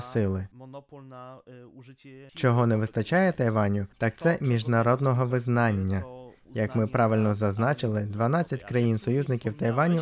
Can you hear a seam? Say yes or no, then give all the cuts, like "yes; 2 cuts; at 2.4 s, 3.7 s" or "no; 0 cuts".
yes; 2 cuts; at 2.3 s, 3.9 s